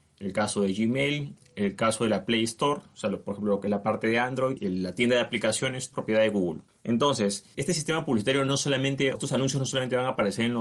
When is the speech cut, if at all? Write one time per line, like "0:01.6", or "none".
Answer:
0:05.9
0:09.2